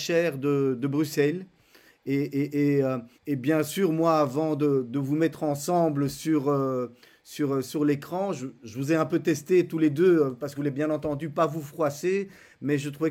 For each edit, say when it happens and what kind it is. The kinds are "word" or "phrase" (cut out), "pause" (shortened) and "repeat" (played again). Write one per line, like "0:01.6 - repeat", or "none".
0:03.1 - pause
0:10.5 - phrase

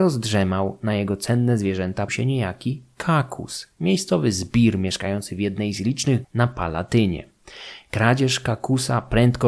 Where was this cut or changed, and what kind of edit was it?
0:02.1 - word
0:06.2 - word

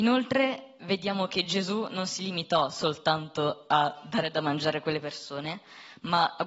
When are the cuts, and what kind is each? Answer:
none

